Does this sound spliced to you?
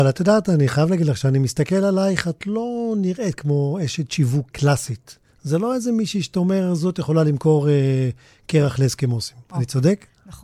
yes; 1 cut; at 4.5 s

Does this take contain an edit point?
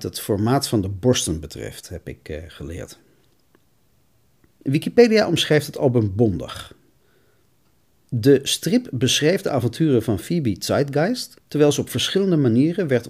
no; 0 cuts

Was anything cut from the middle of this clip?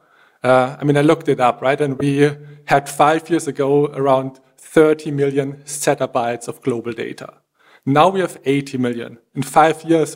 no; 0 cuts

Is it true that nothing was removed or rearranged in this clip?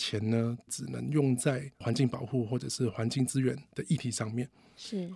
no; 1 cut; at 1.7 s

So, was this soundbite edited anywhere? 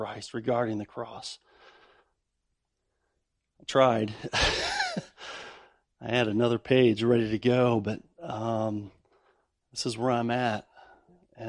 no; 0 cuts

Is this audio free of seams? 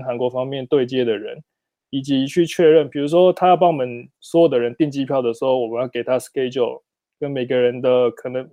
yes; 0 cuts

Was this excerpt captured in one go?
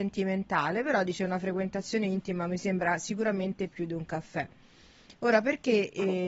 yes; 0 cuts

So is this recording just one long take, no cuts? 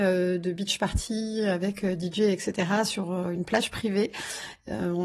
yes; 0 cuts

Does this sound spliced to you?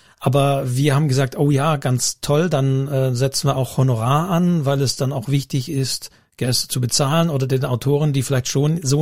no; 0 cuts

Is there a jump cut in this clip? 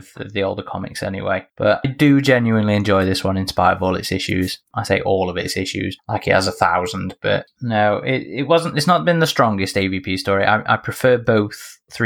yes; 1 cut; at 1.8 s

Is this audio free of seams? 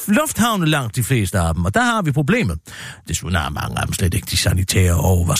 yes; 0 cuts

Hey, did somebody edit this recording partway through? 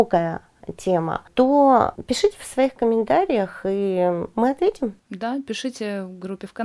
yes; 1 cut; at 5.0 s

